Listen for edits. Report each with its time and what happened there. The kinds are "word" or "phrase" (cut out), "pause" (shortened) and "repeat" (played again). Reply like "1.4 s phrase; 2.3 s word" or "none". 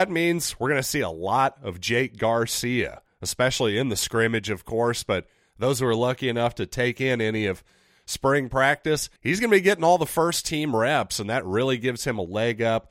9.2 s pause